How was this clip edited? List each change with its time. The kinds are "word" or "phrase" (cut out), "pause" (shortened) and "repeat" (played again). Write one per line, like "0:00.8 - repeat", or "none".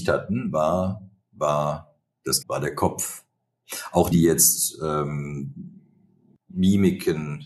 0:01.2 - word
0:02.4 - word
0:04.1 - word

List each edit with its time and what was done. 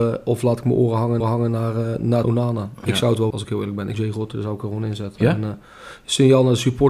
0:01.2 - repeat
0:02.2 - phrase
0:03.3 - word
0:03.9 - word

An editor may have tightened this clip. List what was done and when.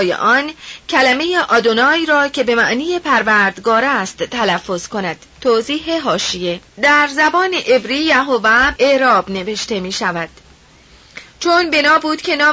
0:05.3 - pause
0:06.7 - pause
0:08.8 - word

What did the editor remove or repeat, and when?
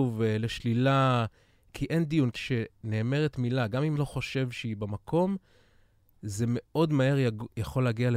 0:02.4 - word
0:04.0 - word

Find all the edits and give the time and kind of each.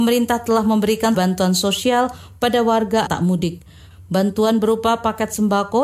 0:01.1 - word
0:03.1 - word

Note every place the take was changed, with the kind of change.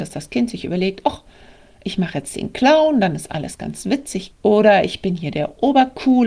0:04.3 - phrase

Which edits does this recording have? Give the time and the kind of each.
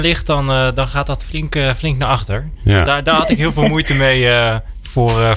none

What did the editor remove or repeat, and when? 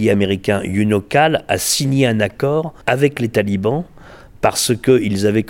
0:02.8 - pause

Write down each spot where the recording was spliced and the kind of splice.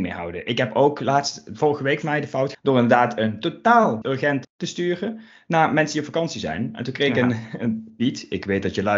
0:02.0 - word
0:02.5 - word
0:04.0 - word
0:04.4 - word

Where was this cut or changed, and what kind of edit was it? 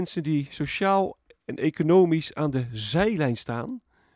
none

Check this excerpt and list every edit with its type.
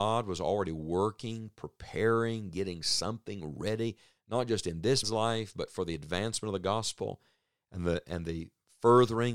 0:05.0 - word

